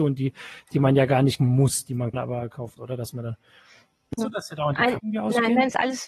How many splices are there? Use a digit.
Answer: 5